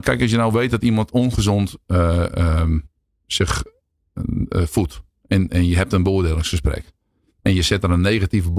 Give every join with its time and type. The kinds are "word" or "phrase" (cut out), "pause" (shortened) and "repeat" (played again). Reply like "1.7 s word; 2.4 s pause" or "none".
none